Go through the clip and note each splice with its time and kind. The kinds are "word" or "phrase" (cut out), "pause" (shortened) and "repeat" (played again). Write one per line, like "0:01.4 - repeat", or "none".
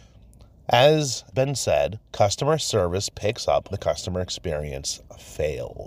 0:01.3 - word
0:02.1 - pause
0:03.7 - word